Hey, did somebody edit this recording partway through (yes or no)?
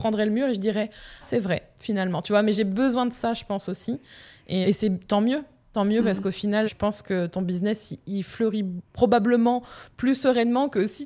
yes